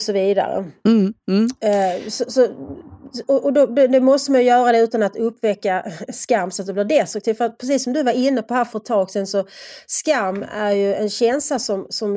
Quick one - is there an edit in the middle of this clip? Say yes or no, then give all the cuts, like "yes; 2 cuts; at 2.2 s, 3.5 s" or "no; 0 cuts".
no; 0 cuts